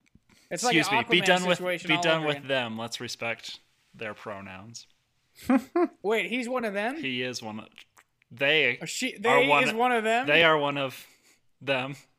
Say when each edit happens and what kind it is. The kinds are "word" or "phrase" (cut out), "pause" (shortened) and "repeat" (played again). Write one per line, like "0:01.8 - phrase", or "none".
none